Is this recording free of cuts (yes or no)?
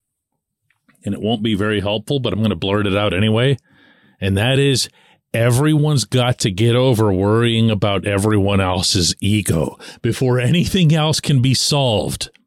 yes